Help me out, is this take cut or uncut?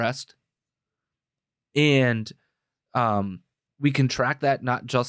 cut